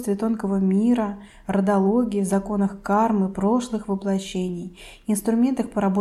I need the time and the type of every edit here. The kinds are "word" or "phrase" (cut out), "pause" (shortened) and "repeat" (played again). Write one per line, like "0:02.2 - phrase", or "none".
none